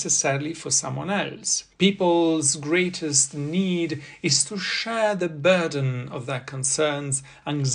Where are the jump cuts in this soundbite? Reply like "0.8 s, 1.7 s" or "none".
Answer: 1.7 s